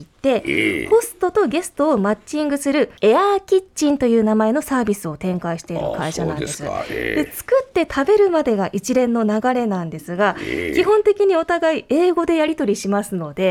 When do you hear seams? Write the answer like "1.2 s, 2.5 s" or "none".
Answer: 3.0 s